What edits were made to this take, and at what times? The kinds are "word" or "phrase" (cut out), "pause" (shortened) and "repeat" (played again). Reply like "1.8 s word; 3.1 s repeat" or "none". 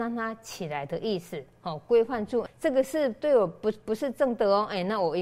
2.5 s word